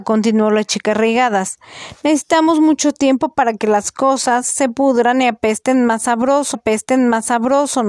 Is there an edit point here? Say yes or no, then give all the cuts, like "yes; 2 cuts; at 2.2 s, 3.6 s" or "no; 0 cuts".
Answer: yes; 1 cut; at 6.5 s